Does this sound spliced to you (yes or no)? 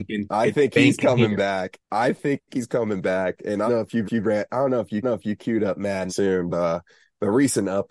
yes